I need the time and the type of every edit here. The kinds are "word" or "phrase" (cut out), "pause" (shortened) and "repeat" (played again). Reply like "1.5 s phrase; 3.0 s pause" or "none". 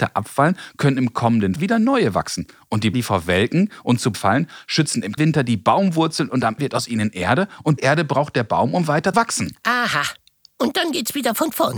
1.6 s word; 2.9 s word; 4.1 s word; 5.2 s word; 6.6 s word; 7.8 s word; 9.1 s word